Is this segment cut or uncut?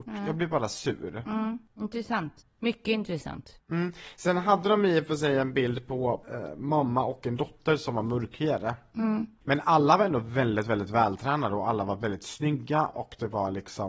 uncut